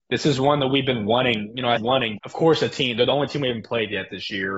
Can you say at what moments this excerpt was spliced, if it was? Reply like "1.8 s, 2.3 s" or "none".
1.8 s, 2.2 s